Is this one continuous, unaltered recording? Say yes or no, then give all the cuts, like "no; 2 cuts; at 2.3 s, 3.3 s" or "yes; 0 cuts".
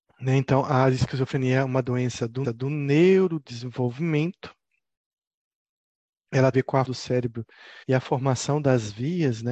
no; 4 cuts; at 2.4 s, 6.5 s, 6.8 s, 7.8 s